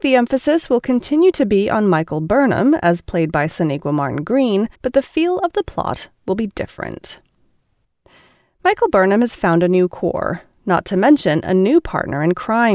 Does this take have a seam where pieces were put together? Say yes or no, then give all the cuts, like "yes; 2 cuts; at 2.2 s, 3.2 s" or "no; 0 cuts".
yes; 1 cut; at 4.8 s